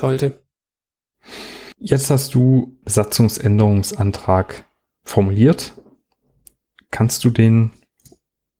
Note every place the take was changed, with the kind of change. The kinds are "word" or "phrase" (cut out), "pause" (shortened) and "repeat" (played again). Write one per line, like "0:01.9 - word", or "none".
0:01.7 - pause
0:02.8 - word
0:05.0 - word